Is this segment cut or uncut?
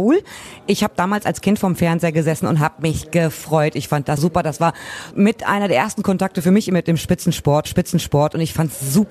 cut